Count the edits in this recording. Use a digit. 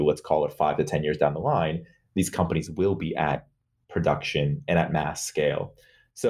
0